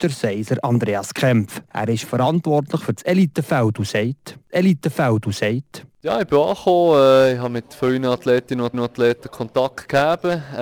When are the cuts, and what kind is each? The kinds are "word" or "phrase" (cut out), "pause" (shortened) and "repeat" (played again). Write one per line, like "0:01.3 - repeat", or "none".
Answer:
0:04.5 - repeat
0:08.7 - repeat

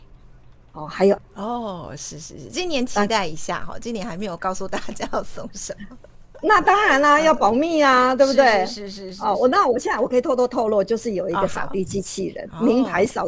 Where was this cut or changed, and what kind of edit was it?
0:01.2 - word

